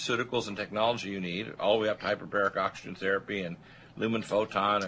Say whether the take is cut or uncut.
uncut